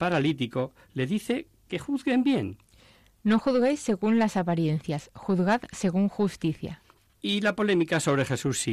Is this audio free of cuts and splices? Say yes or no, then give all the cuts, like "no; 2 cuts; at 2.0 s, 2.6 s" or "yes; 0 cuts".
no; 1 cut; at 1.7 s